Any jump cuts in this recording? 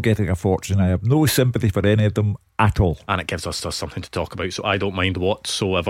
yes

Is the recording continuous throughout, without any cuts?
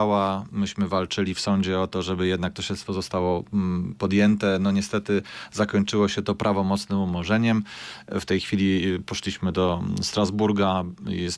yes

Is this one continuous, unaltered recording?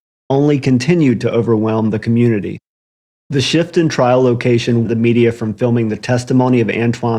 no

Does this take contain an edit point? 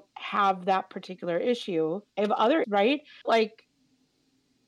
yes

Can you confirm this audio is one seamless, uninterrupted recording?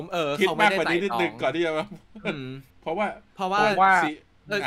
no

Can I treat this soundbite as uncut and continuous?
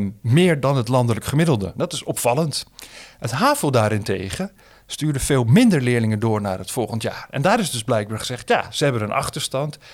yes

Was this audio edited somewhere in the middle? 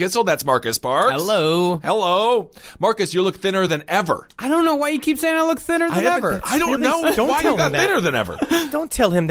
no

